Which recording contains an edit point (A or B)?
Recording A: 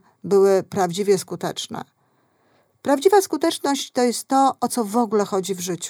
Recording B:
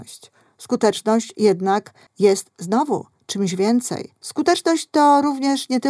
B